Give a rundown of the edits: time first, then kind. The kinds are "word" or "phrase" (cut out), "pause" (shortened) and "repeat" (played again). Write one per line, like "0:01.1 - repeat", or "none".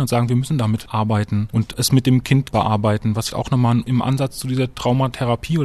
0:02.5 - word
0:03.3 - word
0:03.8 - word

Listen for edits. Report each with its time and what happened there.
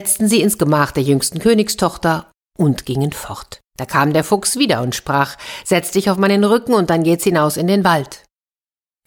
0:03.7 - pause

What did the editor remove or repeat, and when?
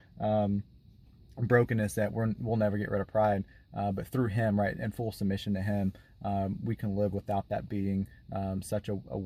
none

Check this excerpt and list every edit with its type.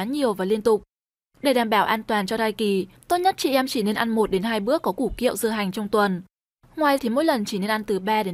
0:07.0 - word

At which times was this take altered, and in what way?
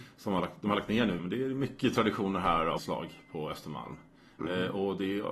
0:01.2 - word
0:02.8 - word

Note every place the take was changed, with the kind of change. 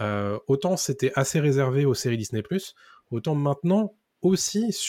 none

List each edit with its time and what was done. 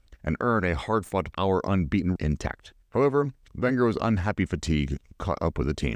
0:01.3 - phrase
0:02.2 - word
0:02.8 - pause

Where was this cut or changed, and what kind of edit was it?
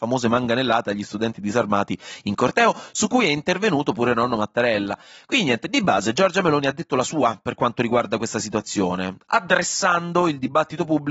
none

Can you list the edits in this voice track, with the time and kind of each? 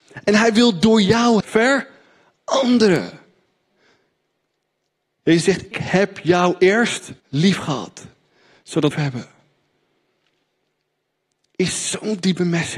0:01.4 - phrase
0:05.7 - word
0:07.2 - pause
0:08.9 - phrase

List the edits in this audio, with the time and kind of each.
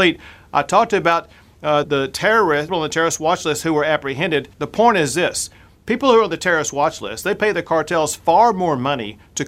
0:01.8 - word
0:02.7 - phrase
0:04.5 - pause

